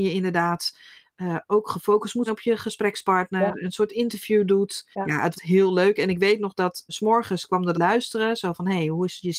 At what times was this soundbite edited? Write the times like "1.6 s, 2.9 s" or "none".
2.3 s, 4.9 s, 5.3 s, 6.9 s, 7.7 s